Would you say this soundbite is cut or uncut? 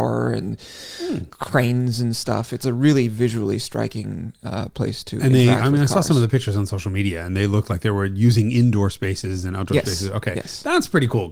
uncut